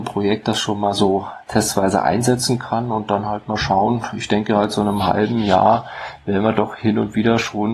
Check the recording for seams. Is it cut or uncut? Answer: uncut